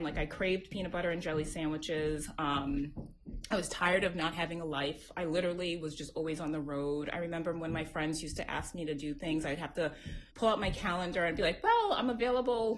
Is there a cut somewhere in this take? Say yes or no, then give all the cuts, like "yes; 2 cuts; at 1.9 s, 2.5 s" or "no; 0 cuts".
yes; 1 cut; at 10.3 s